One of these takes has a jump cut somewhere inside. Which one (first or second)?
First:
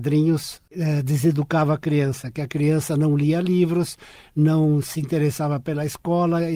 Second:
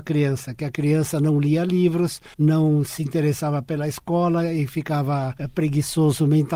second